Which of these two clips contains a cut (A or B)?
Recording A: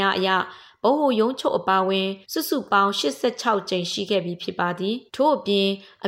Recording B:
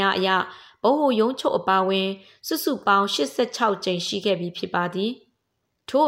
A